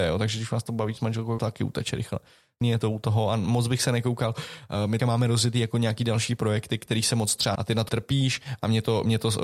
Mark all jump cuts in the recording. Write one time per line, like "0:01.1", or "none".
0:01.4
0:02.6
0:05.0
0:07.6
0:07.9